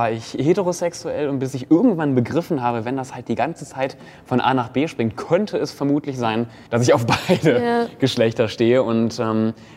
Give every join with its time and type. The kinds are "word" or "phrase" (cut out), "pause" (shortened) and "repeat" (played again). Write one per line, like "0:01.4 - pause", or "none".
0:06.7 - pause